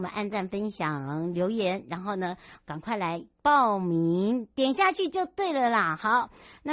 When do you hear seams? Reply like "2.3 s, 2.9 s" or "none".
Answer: none